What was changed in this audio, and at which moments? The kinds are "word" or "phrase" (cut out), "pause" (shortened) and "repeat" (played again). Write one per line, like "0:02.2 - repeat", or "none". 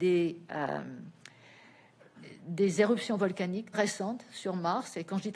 0:03.7 - word

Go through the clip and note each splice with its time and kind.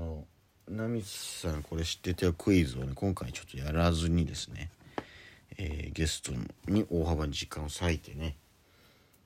0:06.6 - pause

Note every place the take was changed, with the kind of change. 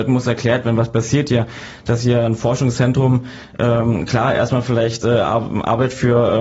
none

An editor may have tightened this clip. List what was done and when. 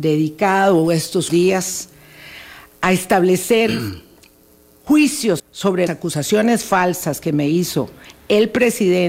0:01.3 - word
0:05.4 - word
0:05.9 - word

